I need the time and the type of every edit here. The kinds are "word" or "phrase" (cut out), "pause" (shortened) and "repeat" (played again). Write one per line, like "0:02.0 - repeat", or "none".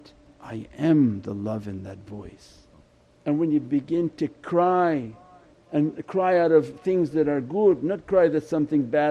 0:02.8 - pause